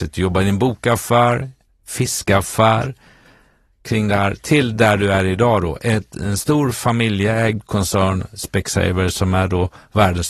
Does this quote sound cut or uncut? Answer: uncut